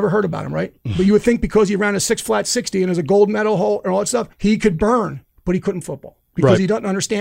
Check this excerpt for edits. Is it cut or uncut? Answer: cut